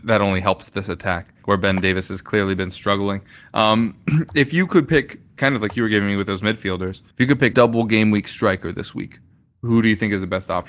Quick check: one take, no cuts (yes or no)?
no